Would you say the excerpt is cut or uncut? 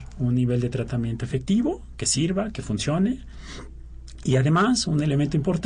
uncut